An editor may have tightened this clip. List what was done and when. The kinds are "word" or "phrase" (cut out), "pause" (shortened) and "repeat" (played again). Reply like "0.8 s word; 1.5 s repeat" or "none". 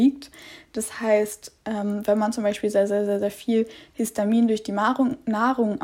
none